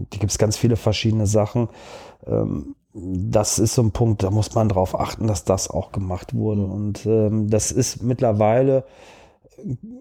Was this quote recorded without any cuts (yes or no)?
yes